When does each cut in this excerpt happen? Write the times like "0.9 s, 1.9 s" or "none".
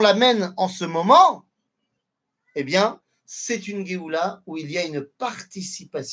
none